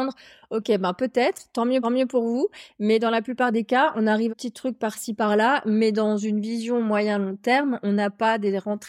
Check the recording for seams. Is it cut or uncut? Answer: cut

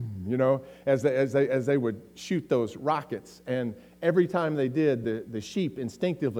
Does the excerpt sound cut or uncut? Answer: uncut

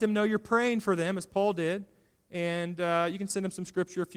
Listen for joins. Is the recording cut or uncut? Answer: uncut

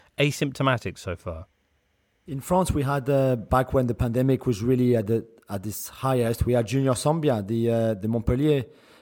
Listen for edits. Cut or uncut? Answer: uncut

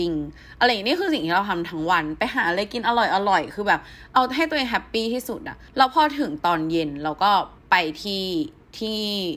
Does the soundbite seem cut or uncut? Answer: cut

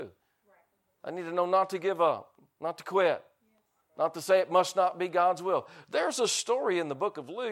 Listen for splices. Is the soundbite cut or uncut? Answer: uncut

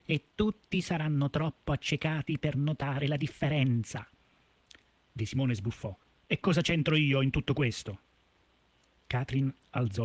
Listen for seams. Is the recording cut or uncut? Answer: uncut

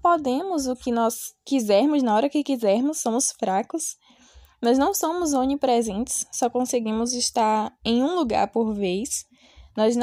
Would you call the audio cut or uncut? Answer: uncut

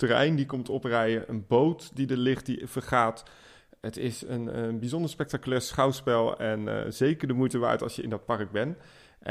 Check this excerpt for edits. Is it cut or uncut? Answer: uncut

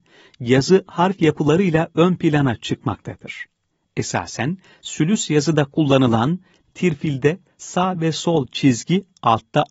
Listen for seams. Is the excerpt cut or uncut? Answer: uncut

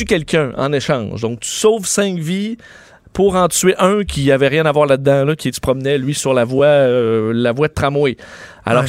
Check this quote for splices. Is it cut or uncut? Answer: uncut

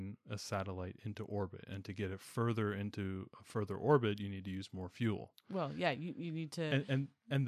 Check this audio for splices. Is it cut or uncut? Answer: uncut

